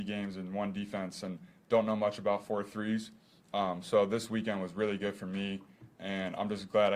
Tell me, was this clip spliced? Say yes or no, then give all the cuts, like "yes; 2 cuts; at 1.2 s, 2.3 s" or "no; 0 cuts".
no; 0 cuts